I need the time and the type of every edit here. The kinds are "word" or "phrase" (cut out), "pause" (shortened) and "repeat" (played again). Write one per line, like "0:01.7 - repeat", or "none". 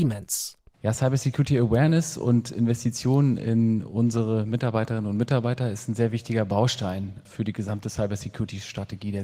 none